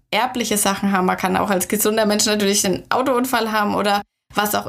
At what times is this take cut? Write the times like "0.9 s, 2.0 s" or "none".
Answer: none